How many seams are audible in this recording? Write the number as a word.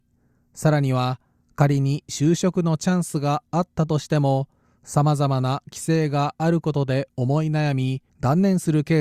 one